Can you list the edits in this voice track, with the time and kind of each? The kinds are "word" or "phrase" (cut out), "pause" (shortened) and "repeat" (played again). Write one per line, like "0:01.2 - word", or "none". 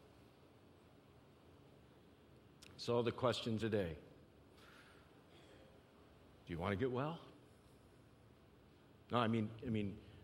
0:03.6 - word